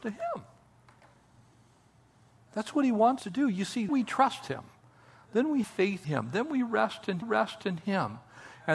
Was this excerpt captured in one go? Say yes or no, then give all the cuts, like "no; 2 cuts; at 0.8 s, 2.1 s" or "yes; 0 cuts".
no; 5 cuts; at 3.2 s, 3.9 s, 5.6 s, 6.0 s, 7.2 s